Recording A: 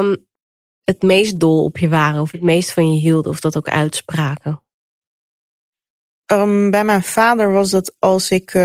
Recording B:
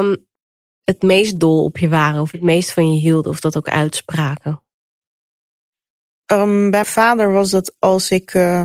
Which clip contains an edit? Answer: B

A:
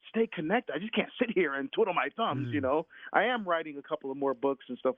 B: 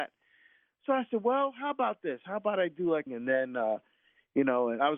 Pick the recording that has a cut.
B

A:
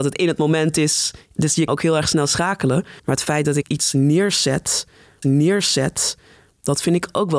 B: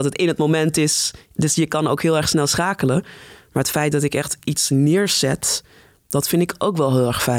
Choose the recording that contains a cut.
A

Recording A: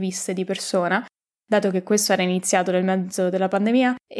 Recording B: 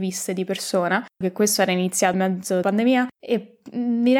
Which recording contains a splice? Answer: B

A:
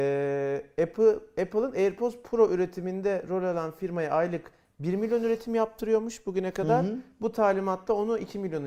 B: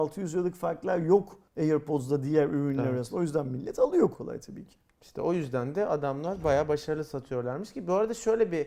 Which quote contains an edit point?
B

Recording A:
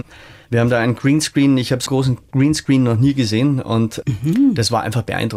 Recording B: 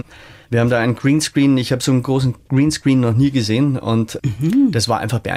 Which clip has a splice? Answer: A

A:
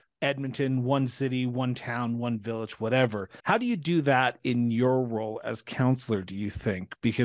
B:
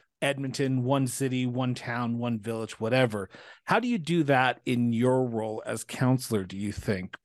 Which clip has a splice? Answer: A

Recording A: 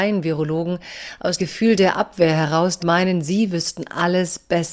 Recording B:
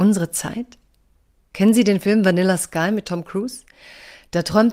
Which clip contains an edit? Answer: A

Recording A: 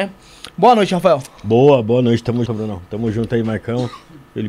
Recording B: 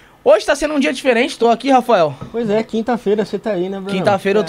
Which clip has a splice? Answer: A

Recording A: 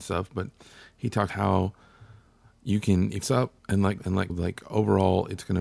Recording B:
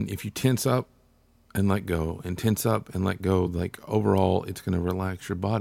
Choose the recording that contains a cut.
A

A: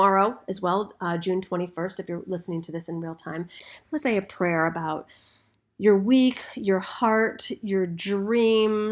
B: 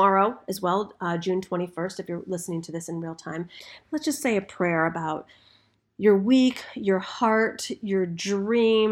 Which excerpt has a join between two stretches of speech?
A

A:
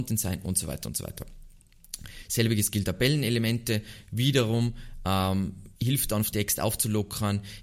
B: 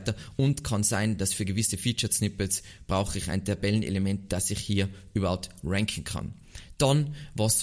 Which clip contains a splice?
A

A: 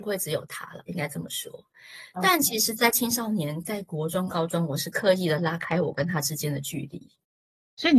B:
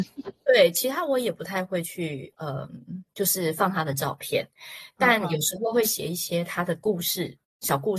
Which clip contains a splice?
B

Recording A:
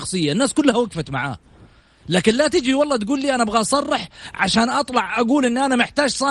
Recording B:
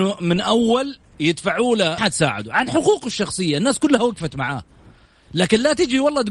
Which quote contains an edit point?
B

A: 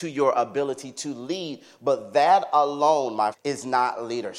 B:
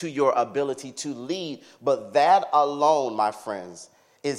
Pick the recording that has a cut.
A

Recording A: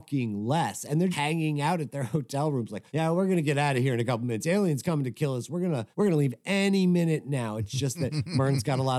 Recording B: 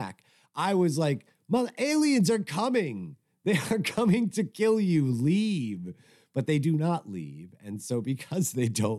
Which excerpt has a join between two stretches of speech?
A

